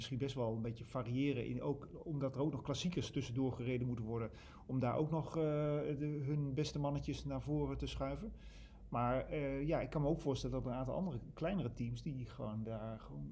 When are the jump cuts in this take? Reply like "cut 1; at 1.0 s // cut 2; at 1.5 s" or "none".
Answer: none